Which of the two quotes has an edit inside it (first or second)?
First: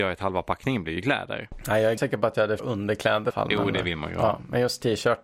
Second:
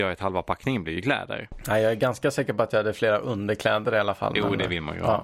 first